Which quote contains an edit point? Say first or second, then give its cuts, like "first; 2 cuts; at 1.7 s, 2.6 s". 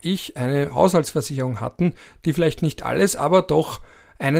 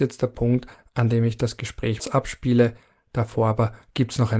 second; 1 cut; at 2.0 s